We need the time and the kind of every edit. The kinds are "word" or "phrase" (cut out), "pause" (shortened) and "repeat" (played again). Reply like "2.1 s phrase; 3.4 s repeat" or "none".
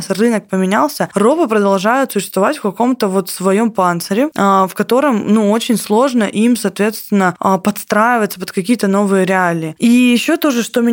none